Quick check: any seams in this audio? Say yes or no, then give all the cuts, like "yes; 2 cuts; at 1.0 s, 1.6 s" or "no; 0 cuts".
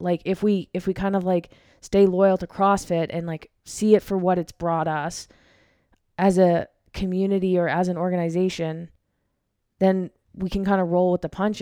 yes; 1 cut; at 10.2 s